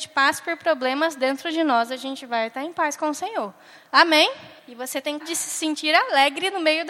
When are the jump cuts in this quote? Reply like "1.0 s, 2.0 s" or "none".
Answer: 4.6 s, 5.2 s